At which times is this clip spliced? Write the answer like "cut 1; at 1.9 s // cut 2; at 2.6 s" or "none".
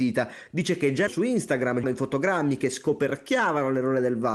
cut 1; at 1.1 s // cut 2; at 1.8 s